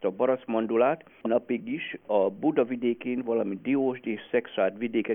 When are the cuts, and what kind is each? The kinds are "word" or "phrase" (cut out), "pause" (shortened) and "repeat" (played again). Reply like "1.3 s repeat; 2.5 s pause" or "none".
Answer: 1.2 s word